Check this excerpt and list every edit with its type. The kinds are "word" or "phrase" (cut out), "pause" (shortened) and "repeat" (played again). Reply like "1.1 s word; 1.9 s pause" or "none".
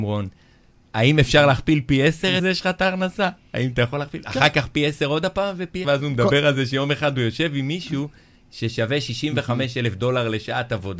2.4 s word; 5.8 s word